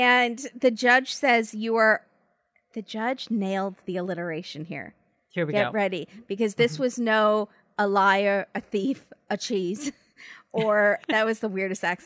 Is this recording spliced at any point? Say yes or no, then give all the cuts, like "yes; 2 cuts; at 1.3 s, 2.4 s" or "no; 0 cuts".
no; 0 cuts